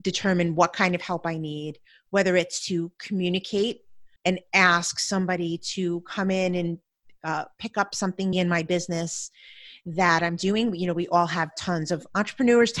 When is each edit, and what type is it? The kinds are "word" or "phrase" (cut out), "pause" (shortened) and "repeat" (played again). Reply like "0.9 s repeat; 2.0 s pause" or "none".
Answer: 4.2 s pause; 8.3 s word